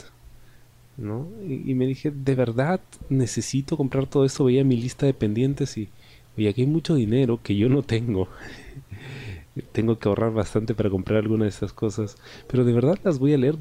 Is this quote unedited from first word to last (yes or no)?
yes